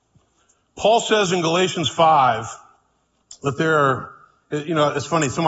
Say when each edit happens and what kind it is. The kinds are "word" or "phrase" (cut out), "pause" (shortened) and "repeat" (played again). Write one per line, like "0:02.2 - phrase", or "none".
none